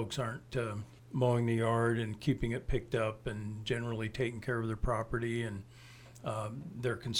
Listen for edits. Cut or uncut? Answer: cut